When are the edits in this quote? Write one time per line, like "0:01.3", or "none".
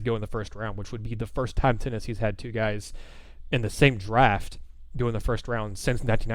none